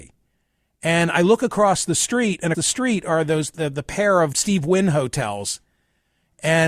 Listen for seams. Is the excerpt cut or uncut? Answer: cut